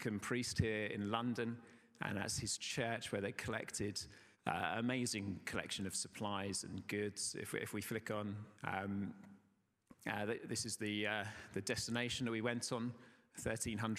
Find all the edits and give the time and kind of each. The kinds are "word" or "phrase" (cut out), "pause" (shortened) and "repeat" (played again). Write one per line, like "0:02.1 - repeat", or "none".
0:04.3 - pause
0:08.6 - pause